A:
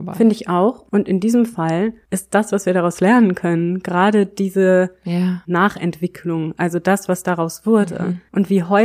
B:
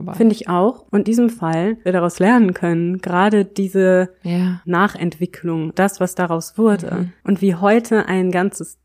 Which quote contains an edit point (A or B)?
B